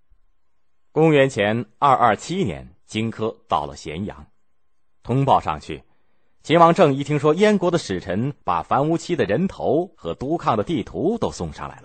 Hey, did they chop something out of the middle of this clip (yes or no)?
yes